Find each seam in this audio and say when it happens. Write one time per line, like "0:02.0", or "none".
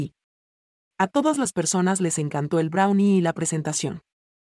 none